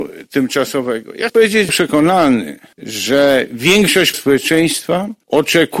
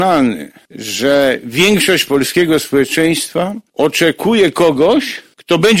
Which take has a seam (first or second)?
first